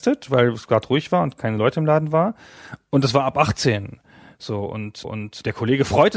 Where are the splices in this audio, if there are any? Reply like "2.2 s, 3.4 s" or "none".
5.0 s